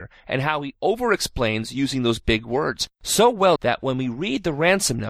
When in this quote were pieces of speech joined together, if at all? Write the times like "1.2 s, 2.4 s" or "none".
3.6 s